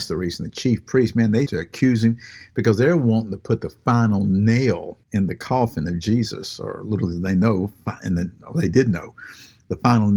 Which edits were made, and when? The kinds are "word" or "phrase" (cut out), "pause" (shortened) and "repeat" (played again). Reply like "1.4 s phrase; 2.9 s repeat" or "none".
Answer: 1.5 s word; 5.0 s pause